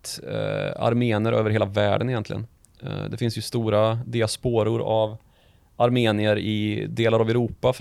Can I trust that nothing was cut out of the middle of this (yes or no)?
yes